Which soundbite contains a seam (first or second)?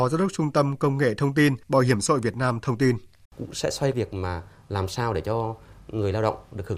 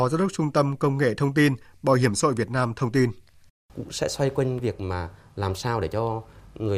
first